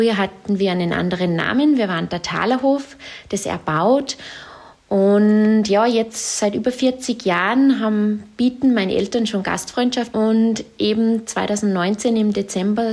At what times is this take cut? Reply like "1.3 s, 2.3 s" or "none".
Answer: none